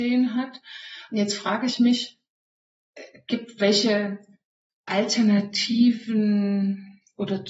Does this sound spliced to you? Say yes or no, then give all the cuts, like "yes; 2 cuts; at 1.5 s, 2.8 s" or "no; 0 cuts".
no; 0 cuts